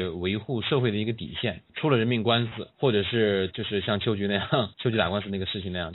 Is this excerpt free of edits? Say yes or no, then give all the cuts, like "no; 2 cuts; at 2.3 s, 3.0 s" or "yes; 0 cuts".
no; 1 cut; at 4.7 s